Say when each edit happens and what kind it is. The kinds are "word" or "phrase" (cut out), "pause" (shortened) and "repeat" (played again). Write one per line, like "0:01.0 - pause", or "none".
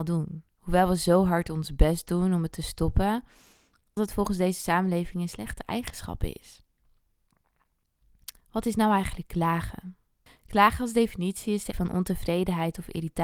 0:04.0 - word
0:08.4 - pause
0:10.3 - pause
0:11.7 - word

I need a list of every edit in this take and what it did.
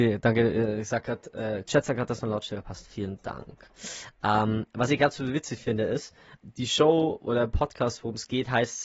0:06.4 - word

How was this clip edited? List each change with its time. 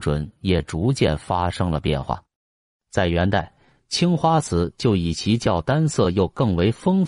none

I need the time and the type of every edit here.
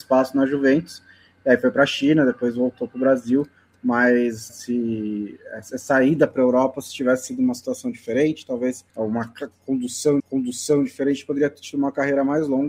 0:04.5 - word
0:08.9 - pause
0:10.2 - repeat

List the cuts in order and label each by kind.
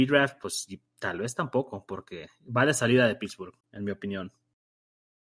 0:03.6 - pause

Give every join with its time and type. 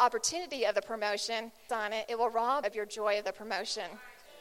0:01.7 - phrase
0:02.6 - word

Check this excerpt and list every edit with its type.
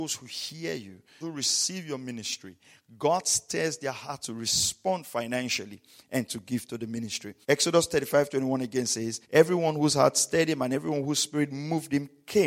0:01.2 - word
0:07.4 - pause
0:09.2 - pause

